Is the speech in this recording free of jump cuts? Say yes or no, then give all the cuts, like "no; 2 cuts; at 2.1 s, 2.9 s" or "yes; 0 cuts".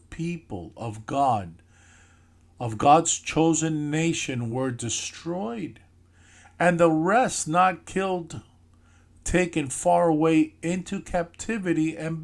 yes; 0 cuts